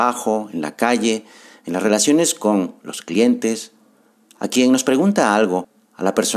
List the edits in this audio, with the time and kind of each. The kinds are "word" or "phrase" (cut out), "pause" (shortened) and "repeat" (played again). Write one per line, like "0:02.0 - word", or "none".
none